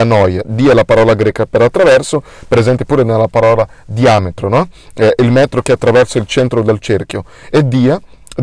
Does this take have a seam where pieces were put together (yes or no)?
no